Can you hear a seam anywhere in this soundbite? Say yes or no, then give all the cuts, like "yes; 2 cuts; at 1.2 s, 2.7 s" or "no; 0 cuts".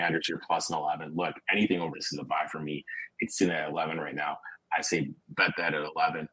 yes; 2 cuts; at 1.9 s, 5.2 s